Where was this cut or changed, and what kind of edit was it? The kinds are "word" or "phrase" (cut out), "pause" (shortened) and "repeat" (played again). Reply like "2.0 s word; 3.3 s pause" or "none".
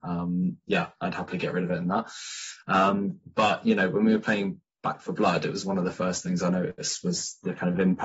none